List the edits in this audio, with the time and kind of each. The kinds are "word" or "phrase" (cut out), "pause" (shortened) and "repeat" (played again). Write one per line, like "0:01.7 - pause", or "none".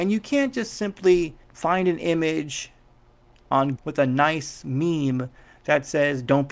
0:01.4 - pause
0:03.8 - word